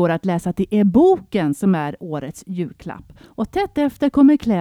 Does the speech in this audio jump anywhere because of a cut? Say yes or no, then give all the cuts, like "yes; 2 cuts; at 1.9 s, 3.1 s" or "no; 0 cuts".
no; 0 cuts